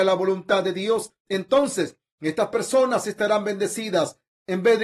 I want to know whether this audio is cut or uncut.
uncut